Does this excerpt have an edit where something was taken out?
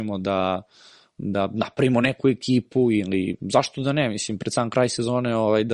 no; 0 cuts

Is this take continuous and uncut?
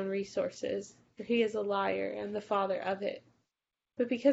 yes; 0 cuts

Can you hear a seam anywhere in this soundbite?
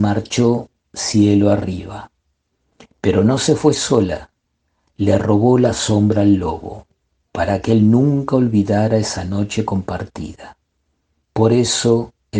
no; 0 cuts

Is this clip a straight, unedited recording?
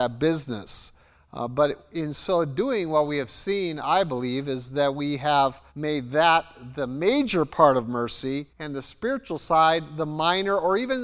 no; 2 cuts; at 5.7 s, 8.5 s

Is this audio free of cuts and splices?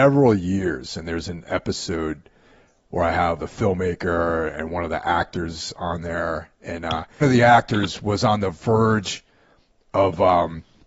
no; 2 cuts; at 3.4 s, 7.2 s

